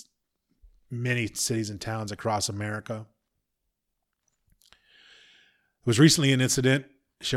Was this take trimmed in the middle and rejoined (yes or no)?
no